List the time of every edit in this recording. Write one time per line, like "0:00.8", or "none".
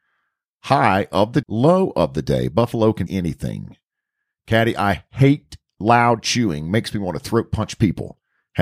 0:01.4
0:03.1